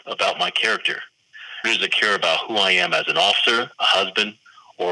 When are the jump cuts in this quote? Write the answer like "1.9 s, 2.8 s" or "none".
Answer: 1.6 s, 3.7 s